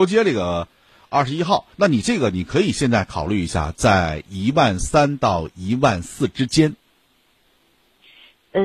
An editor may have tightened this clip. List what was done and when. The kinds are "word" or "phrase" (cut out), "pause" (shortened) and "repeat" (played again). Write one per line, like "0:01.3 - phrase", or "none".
0:01.7 - pause